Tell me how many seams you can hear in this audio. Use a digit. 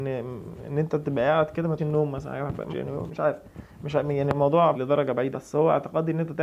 5